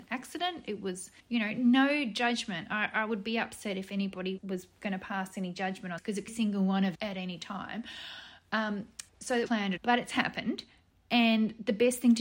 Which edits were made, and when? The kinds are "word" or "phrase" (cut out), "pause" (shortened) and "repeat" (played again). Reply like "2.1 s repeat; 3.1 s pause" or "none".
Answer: 1.2 s pause; 4.4 s word; 6.0 s word; 6.3 s phrase; 6.9 s word; 9.1 s pause; 9.5 s word; 9.8 s word